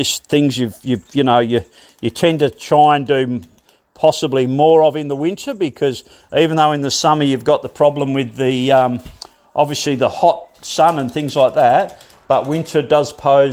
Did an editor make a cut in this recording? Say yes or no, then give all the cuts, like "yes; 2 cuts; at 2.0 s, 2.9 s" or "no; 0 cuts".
no; 0 cuts